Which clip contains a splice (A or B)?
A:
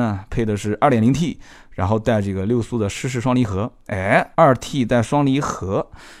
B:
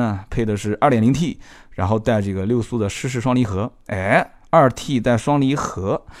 A